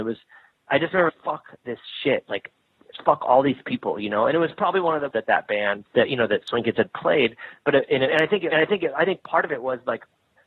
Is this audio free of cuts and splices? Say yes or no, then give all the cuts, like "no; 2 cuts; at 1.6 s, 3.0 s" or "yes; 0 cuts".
no; 4 cuts; at 1.1 s, 5.1 s, 5.9 s, 8.5 s